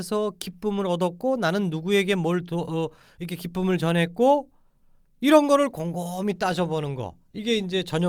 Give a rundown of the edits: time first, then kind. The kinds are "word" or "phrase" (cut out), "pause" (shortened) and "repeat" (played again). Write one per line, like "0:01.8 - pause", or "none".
none